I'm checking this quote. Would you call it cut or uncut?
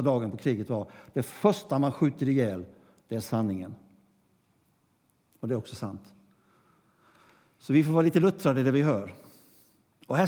uncut